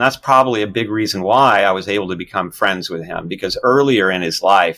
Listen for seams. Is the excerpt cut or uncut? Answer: uncut